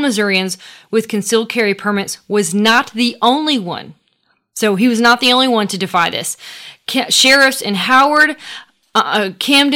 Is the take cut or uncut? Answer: uncut